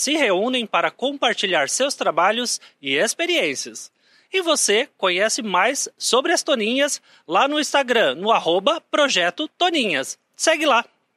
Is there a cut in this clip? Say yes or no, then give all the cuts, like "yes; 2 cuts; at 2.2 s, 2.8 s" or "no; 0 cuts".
no; 0 cuts